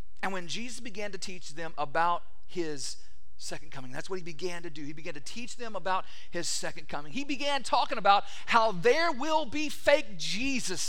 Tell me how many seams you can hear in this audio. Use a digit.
0